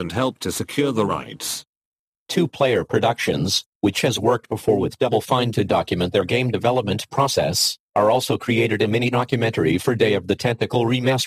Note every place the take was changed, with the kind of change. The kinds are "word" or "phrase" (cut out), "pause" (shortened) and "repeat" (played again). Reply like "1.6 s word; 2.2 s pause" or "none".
none